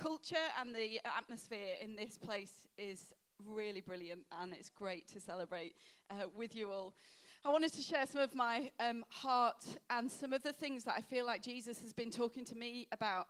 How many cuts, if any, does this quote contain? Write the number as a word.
zero